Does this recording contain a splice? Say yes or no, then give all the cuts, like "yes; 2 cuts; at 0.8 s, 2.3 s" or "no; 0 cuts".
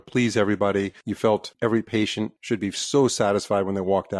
no; 0 cuts